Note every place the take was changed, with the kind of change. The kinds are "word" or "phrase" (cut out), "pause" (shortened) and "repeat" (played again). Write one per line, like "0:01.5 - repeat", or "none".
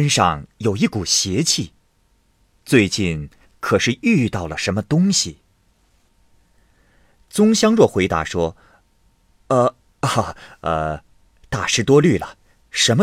none